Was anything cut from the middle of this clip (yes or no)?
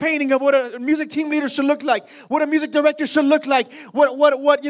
no